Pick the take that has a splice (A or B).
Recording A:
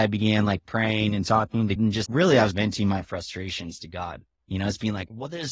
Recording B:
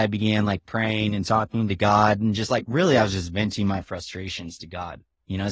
A